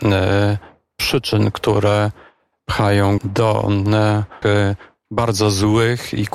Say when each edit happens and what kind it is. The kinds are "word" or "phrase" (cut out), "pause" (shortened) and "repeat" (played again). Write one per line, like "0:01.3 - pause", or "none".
0:03.2 - word
0:04.4 - word